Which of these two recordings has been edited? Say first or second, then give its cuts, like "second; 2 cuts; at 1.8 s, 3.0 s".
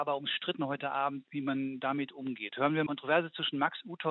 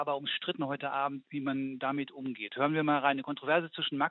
first; 1 cut; at 2.9 s